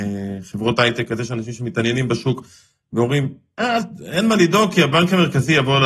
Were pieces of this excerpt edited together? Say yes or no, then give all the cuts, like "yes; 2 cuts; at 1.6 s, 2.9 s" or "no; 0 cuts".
no; 0 cuts